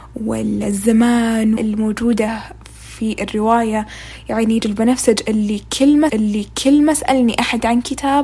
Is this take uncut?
no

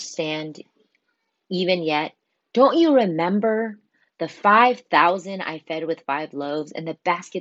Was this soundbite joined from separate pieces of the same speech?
no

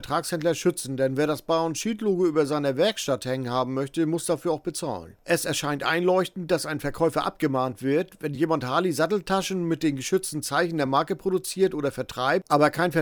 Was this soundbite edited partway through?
no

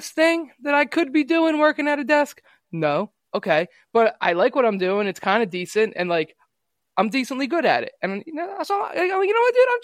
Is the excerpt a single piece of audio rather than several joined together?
yes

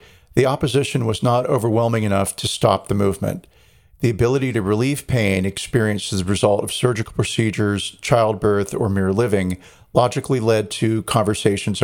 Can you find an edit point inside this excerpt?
no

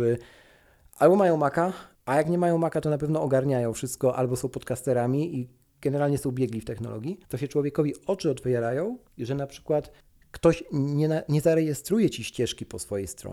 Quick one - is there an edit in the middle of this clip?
yes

